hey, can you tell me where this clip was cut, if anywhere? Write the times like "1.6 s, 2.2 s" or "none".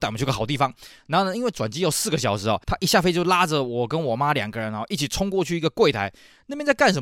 2.6 s